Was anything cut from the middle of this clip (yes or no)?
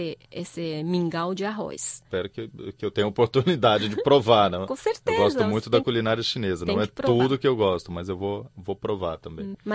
no